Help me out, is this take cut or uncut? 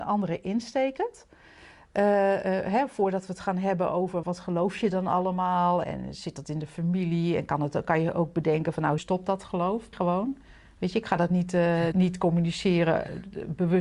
cut